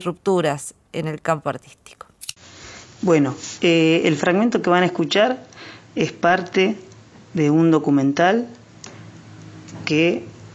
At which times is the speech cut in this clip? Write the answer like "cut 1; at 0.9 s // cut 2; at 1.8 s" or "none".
none